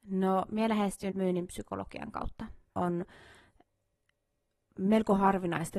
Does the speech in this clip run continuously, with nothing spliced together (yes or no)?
no